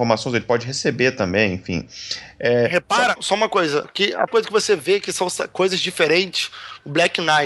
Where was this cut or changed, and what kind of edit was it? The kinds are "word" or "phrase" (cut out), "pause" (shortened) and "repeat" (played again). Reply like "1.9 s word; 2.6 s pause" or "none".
3.2 s word; 3.8 s word; 4.3 s word